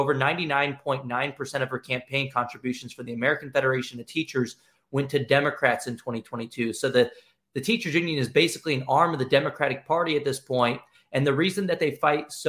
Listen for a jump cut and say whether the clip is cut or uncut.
uncut